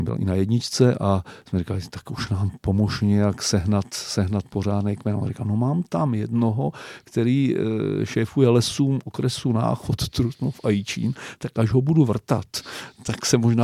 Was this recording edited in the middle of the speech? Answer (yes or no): no